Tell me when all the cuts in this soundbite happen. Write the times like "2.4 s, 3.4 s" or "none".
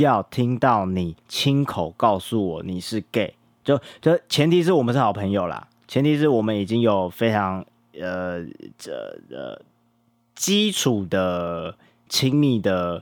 1.2 s, 8.7 s

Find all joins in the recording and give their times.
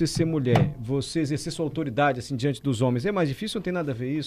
none

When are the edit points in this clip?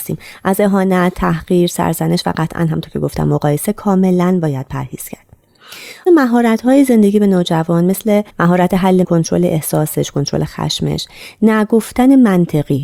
6.1 s, 8.3 s, 9.0 s

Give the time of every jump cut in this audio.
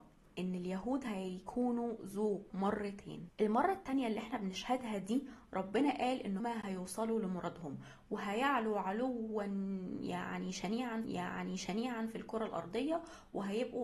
2.5 s, 6.4 s, 11.0 s

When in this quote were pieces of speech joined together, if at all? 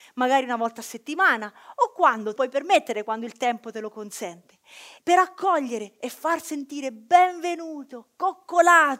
2.4 s, 5.0 s

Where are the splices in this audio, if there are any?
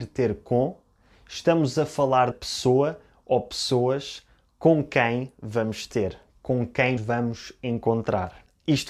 2.3 s, 7.0 s

